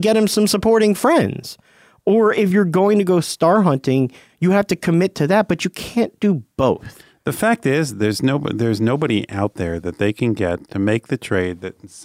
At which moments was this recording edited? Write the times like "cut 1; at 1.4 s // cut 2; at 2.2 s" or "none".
none